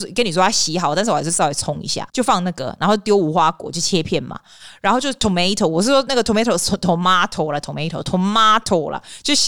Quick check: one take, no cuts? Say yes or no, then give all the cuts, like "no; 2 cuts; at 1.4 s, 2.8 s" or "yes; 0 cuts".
no; 1 cut; at 2.1 s